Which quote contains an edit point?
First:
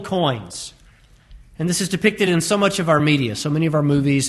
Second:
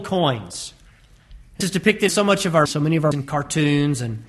second; 4 cuts; at 1.6 s, 2.1 s, 2.7 s, 3.1 s

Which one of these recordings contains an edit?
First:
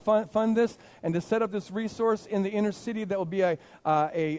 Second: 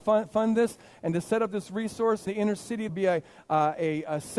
second; 2 cuts; at 2.3 s, 2.9 s

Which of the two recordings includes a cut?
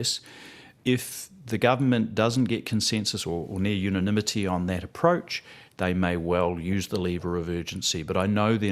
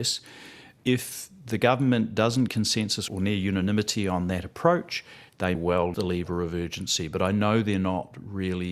second; 4 cuts; at 2.5 s, 3.1 s, 5.5 s, 5.9 s

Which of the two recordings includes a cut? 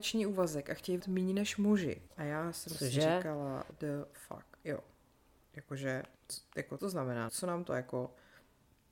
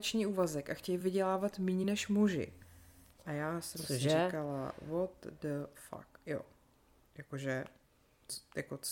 first; 6 cuts; at 1.0 s, 2.1 s, 3.7 s, 6.2 s, 6.8 s, 7.3 s

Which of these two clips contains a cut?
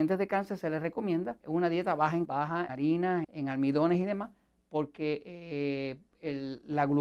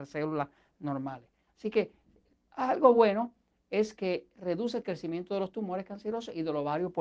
first; 4 cuts; at 1.4 s, 2.2 s, 2.7 s, 3.2 s

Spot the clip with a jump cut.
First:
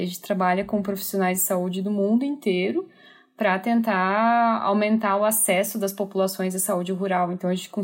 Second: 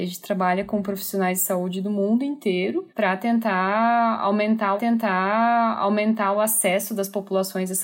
second; 2 cuts; at 2.9 s, 4.8 s

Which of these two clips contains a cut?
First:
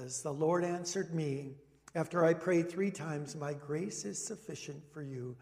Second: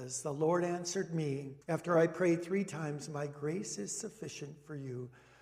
second; 1 cut; at 1.6 s

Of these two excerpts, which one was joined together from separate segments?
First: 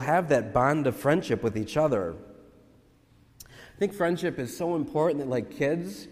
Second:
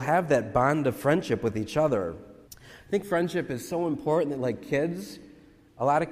second; 1 cut; at 2.4 s

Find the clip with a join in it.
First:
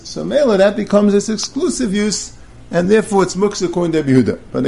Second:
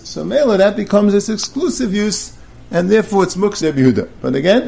second; 1 cut; at 3.6 s

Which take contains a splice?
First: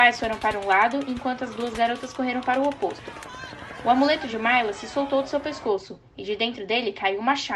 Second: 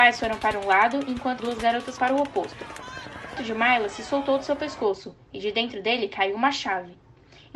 second; 3 cuts; at 1.4 s, 2.0 s, 3.4 s

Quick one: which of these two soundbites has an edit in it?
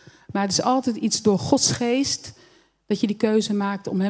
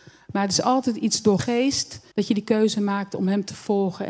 second; 2 cuts; at 1.4 s, 2.1 s

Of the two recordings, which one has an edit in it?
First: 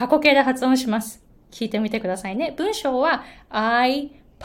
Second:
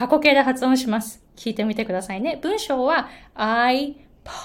second; 1 cut; at 1.3 s

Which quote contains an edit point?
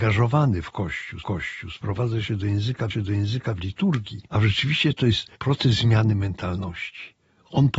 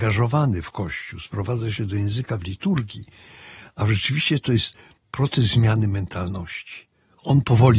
first; 4 cuts; at 1.2 s, 2.9 s, 4.3 s, 5.4 s

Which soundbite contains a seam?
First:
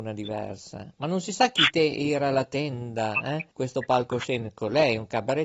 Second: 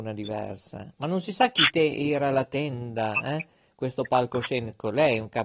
first; 1 cut; at 3.5 s

